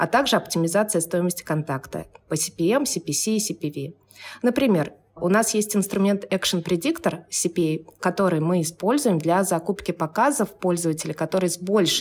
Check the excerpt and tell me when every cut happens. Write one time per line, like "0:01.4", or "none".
none